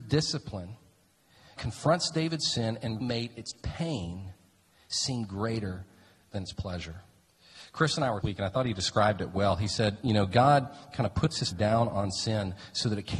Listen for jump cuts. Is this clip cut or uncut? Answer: cut